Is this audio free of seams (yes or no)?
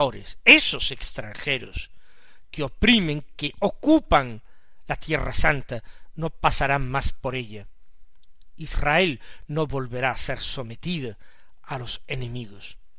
yes